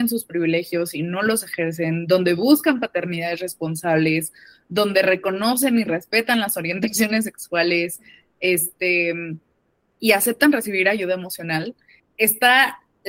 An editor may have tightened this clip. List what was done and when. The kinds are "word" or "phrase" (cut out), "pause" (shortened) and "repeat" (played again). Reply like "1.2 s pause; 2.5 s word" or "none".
12.0 s word